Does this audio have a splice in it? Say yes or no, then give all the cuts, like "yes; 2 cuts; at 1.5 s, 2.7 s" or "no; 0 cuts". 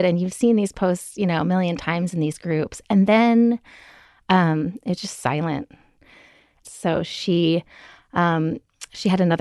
no; 0 cuts